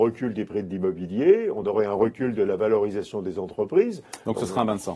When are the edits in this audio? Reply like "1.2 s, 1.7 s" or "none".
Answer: none